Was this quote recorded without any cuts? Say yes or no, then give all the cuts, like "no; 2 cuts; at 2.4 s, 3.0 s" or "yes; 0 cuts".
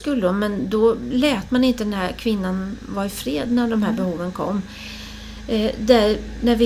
yes; 0 cuts